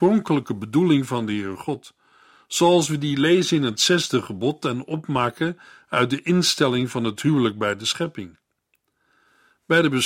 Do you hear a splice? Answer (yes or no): no